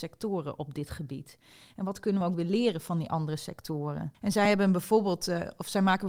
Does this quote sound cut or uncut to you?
uncut